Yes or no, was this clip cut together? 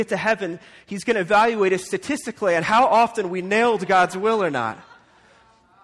no